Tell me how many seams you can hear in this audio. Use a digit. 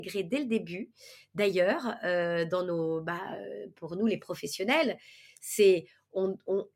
0